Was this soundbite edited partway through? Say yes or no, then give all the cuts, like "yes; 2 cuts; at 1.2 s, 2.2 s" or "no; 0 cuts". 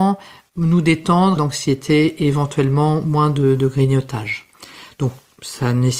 yes; 1 cut; at 1.4 s